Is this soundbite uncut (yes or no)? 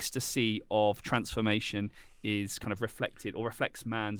yes